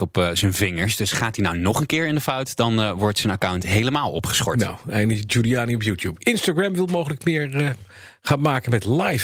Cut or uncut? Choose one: uncut